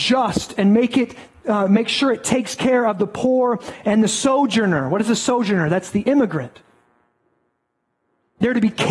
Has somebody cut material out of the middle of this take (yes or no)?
no